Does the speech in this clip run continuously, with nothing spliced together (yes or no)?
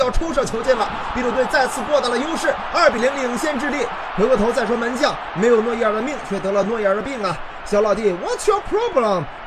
yes